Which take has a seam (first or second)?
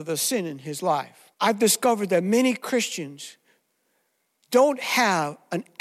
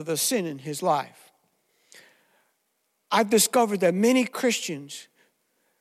first